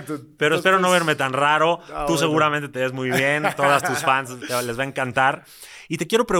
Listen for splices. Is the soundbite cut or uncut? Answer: uncut